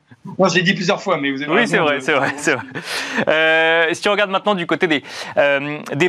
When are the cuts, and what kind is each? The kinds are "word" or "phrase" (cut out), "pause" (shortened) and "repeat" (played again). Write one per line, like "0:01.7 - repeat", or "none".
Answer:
none